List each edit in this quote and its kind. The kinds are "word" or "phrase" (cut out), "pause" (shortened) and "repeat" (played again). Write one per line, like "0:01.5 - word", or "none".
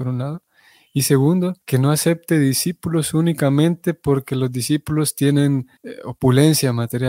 0:01.6 - pause
0:05.8 - pause